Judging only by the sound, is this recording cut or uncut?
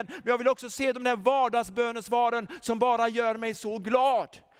uncut